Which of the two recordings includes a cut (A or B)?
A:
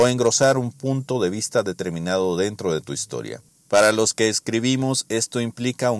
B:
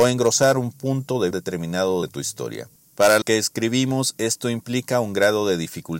B